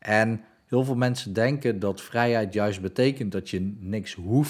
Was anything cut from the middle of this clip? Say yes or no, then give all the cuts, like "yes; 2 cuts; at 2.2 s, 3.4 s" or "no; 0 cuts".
no; 0 cuts